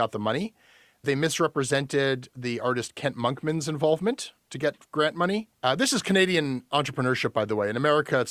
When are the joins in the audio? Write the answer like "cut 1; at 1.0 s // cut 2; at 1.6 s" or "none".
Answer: cut 1; at 5.5 s